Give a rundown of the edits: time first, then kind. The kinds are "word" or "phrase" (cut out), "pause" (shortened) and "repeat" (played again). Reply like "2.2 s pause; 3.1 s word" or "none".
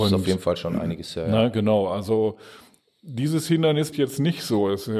3.9 s word